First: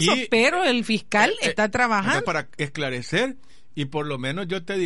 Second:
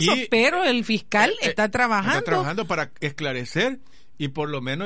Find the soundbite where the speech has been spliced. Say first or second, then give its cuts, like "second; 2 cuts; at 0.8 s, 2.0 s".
first; 1 cut; at 2.2 s